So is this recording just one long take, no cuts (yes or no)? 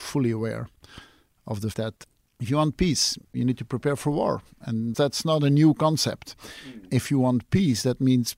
no